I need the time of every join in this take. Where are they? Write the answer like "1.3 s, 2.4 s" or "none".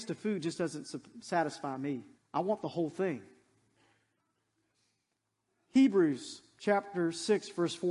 2.1 s